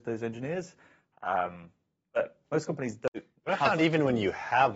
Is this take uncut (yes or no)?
yes